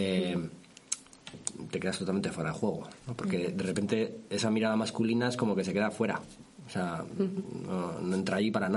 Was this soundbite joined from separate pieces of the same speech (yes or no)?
no